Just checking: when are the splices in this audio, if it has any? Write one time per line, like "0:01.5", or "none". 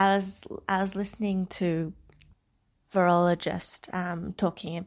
none